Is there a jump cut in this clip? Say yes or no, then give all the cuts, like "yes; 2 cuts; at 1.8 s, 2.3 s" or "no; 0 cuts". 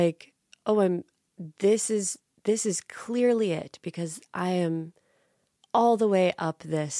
no; 0 cuts